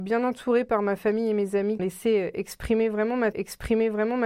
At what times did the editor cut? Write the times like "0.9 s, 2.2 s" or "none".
1.8 s, 3.3 s

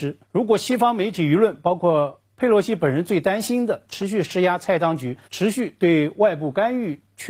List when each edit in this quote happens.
5.2 s

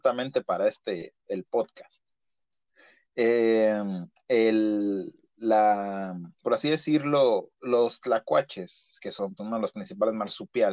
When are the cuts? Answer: 6.3 s, 7.5 s, 9.4 s

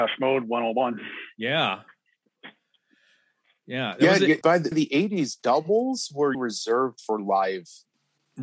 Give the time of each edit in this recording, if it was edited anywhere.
4.4 s, 4.7 s, 6.3 s

